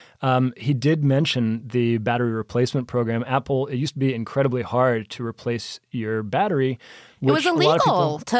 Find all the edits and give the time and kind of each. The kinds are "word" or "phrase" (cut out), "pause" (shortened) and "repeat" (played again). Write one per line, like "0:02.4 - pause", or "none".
none

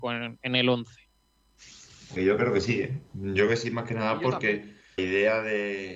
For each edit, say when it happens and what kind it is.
0:02.2 - word
0:03.5 - word
0:05.0 - word

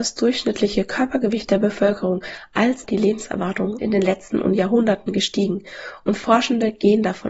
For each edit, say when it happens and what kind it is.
0:02.8 - word
0:03.8 - word
0:04.3 - word

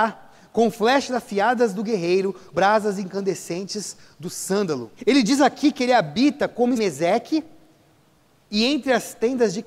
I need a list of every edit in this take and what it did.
0:02.5 - word
0:05.0 - pause
0:06.8 - phrase

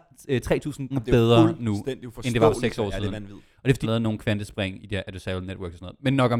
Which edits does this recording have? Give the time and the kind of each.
0:00.9 - word
0:03.8 - word
0:04.8 - word

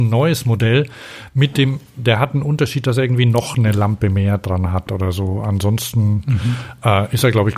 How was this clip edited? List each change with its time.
none

